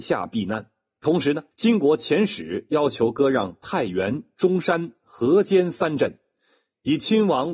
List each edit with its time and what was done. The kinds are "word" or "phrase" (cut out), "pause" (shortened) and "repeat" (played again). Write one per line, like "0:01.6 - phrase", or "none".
0:01.5 - pause